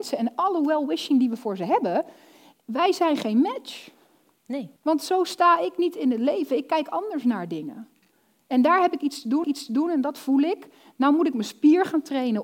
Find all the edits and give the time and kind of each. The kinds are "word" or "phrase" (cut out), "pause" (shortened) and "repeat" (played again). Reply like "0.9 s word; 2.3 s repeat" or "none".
4.8 s pause; 9.4 s repeat